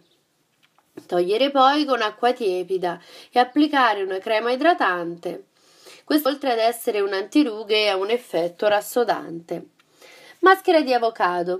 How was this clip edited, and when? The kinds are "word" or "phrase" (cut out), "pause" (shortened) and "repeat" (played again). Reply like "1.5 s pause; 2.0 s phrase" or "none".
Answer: 6.3 s word